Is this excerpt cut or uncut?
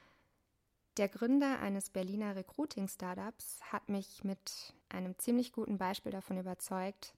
cut